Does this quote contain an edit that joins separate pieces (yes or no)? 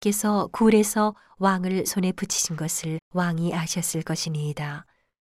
yes